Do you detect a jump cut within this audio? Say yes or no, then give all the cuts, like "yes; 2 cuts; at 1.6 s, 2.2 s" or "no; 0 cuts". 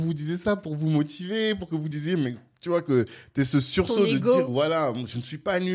no; 0 cuts